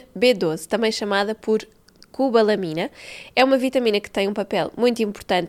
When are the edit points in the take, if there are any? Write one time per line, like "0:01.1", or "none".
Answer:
none

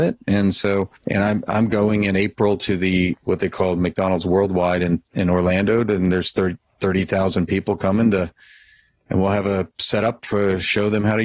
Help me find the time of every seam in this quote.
0:01.0

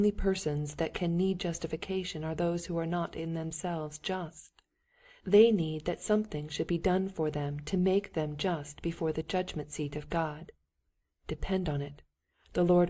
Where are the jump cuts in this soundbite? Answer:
none

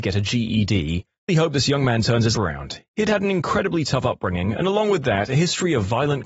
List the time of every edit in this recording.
0:01.3
0:02.3

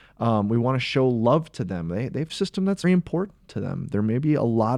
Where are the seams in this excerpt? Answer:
0:02.3
0:02.8

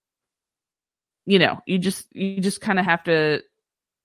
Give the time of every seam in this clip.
none

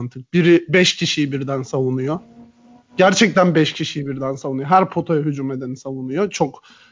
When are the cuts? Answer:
none

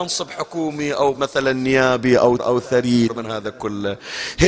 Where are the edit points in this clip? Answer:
0:01.1
0:02.4
0:03.1

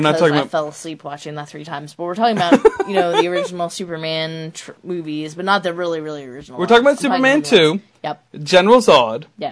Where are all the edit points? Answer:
0:04.8

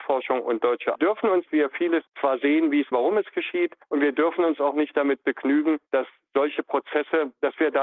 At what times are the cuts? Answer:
0:00.9
0:01.5
0:02.1
0:02.9
0:03.8

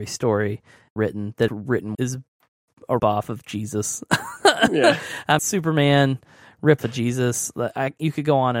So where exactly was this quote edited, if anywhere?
0:01.0
0:01.5
0:01.9
0:03.0
0:05.4
0:06.8

